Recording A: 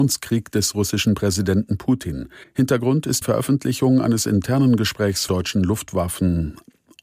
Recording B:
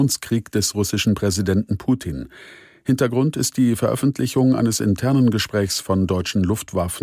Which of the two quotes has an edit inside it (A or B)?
A